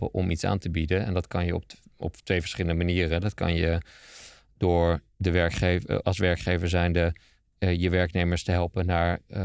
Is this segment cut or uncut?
uncut